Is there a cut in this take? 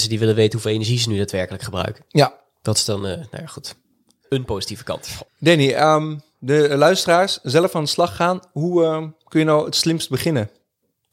no; 0 cuts

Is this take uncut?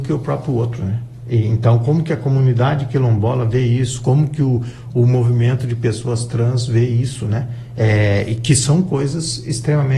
yes; 0 cuts

